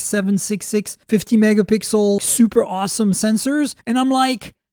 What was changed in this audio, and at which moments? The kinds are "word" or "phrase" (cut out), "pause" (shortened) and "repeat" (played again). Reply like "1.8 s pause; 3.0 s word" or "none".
1.0 s pause; 2.2 s word; 3.8 s pause